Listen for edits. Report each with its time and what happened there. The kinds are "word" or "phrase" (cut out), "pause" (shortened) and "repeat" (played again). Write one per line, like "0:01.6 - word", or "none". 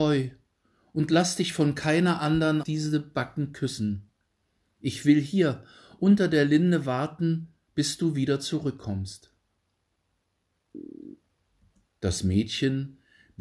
0:02.6 - word